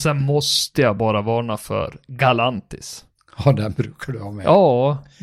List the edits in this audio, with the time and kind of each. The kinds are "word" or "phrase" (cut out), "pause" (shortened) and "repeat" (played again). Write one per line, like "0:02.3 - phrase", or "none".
none

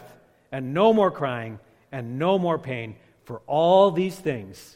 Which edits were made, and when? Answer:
none

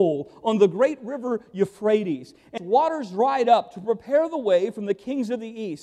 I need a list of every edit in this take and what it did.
0:02.6 - word

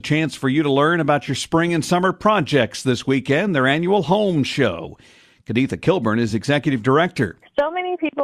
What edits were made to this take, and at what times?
none

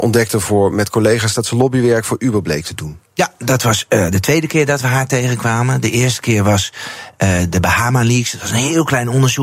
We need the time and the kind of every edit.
none

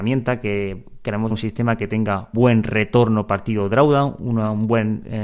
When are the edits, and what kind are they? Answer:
0:01.3 - word
0:02.3 - word

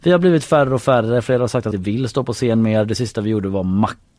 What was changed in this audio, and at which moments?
0:01.7 - phrase

